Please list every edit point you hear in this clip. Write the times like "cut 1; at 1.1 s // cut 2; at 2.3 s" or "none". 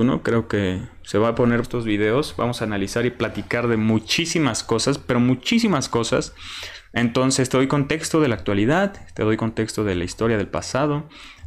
cut 1; at 1.6 s